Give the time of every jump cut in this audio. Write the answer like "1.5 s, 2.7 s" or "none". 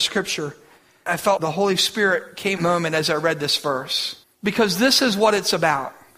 1.4 s, 2.6 s, 4.2 s